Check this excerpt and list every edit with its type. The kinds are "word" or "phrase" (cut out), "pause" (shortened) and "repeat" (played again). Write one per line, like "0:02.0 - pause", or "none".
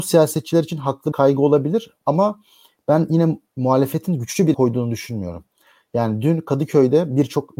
0:01.1 - word
0:04.5 - word